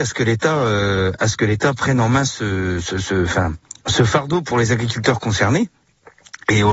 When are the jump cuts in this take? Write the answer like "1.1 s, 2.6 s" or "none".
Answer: none